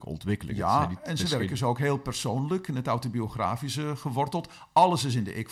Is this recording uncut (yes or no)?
yes